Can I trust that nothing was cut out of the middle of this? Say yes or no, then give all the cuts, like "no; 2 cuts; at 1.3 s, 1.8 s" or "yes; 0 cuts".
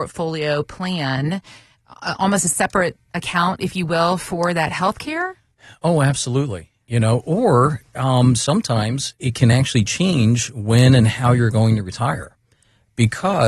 yes; 0 cuts